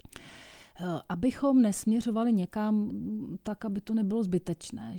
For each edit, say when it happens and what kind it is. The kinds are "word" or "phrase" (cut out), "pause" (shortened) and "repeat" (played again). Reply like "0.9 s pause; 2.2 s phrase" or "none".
none